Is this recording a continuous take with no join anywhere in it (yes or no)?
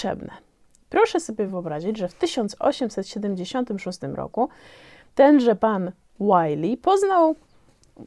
yes